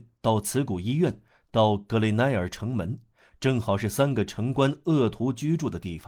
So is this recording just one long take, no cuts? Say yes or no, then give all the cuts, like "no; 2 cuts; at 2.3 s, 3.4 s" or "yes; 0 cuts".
yes; 0 cuts